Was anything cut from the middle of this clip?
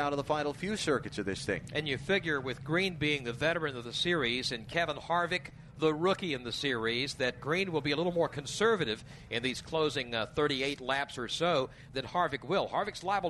yes; 2 cuts; at 7.4 s, 11.9 s

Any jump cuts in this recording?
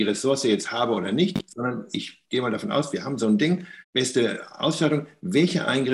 yes; 1 cut; at 3.8 s

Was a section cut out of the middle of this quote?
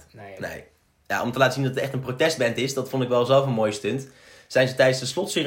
no; 0 cuts

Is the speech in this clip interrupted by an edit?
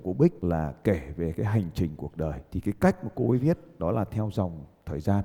no; 0 cuts

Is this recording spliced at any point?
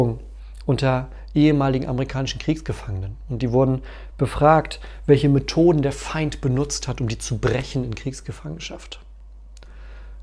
no; 0 cuts

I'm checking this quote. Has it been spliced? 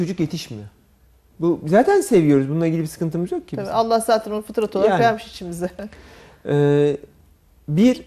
no; 0 cuts

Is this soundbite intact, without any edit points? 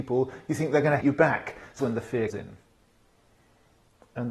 no; 3 cuts; at 1.0 s, 1.8 s, 2.3 s

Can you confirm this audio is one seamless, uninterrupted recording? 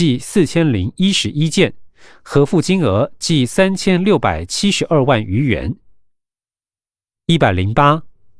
yes; 0 cuts

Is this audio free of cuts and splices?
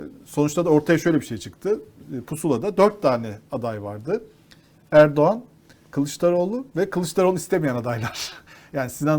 yes; 0 cuts

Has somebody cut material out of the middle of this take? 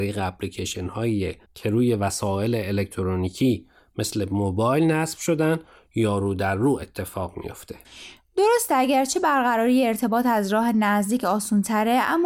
no; 0 cuts

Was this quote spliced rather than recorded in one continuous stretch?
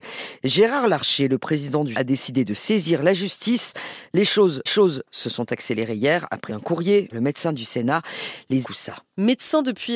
yes; 5 cuts; at 1.9 s, 4.7 s, 6.5 s, 7.1 s, 8.6 s

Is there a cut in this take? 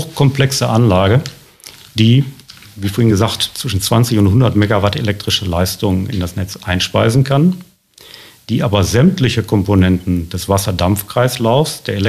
no; 0 cuts

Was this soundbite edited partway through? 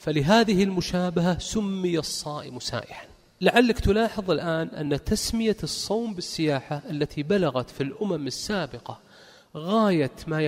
no; 0 cuts

